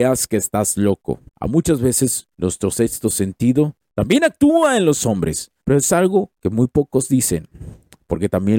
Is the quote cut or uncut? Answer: cut